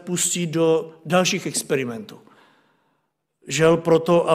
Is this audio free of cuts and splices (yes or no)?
yes